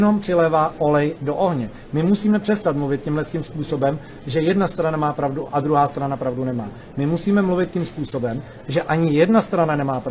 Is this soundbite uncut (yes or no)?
yes